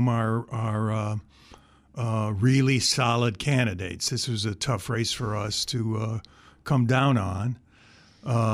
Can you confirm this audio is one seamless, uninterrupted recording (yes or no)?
yes